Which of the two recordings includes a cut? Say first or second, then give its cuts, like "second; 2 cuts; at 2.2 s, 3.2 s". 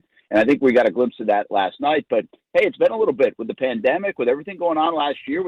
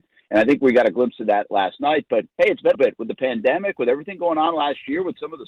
second; 2 cuts; at 2.3 s, 2.7 s